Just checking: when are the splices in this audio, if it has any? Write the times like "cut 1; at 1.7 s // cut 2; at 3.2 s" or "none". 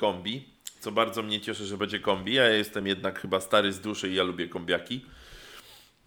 none